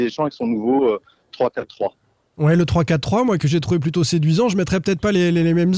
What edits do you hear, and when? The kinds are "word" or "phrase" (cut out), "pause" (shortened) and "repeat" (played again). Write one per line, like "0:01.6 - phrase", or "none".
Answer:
0:03.4 - word